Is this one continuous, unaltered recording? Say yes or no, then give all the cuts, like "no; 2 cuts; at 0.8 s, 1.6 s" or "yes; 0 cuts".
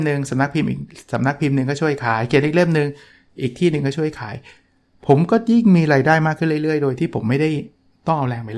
yes; 0 cuts